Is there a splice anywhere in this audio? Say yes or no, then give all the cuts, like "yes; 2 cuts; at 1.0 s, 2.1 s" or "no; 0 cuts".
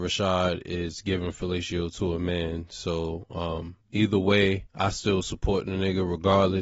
yes; 1 cut; at 4.7 s